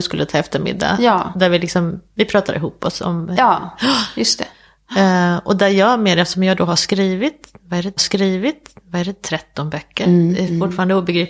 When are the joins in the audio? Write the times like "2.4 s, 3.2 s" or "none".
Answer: 8.0 s